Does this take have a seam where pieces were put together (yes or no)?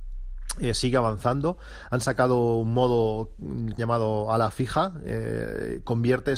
yes